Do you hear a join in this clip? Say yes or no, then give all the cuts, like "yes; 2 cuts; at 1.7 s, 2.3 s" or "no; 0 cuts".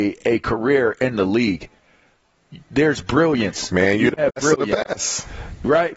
no; 0 cuts